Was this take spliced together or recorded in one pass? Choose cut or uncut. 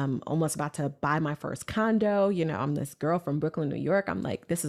uncut